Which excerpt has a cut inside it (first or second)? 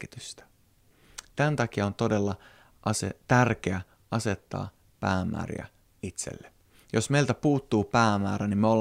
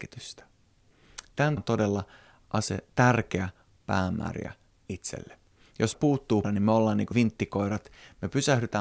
second